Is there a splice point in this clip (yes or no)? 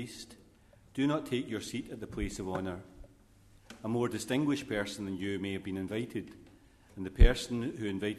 no